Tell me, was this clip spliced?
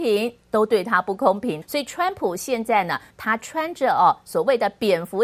yes; 1 cut; at 1.6 s

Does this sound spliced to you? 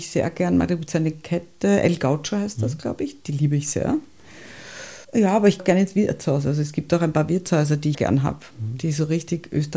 yes; 3 cuts; at 5.0 s, 5.6 s, 7.9 s

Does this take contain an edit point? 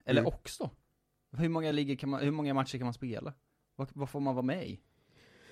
no; 0 cuts

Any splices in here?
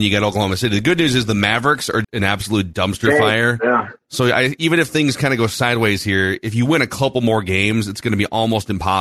yes; 1 cut; at 2.0 s

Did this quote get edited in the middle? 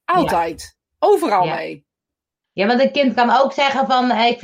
no; 0 cuts

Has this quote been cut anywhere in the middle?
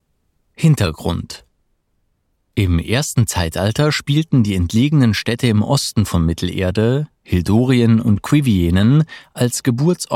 no; 0 cuts

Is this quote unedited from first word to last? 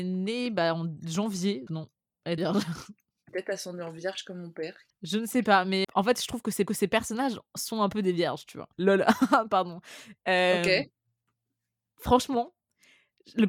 no; 8 cuts; at 1.7 s, 2.4 s, 3.3 s, 4.9 s, 5.8 s, 6.7 s, 8.7 s, 10.2 s

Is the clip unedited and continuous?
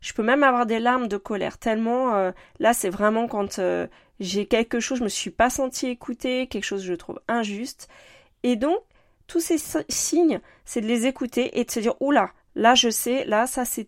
yes; 0 cuts

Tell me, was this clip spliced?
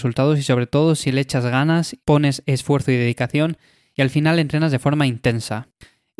no; 0 cuts

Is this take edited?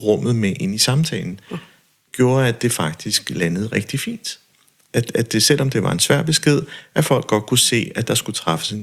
no; 0 cuts

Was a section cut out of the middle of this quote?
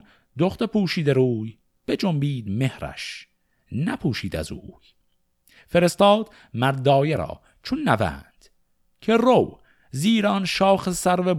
no; 0 cuts

